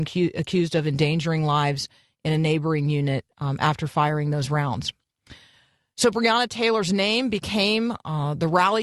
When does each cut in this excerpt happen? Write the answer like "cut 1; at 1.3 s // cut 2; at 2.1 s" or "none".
none